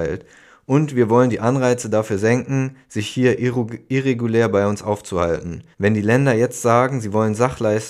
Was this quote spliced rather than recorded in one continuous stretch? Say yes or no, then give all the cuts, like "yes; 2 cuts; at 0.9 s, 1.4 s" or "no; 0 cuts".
yes; 1 cut; at 5.7 s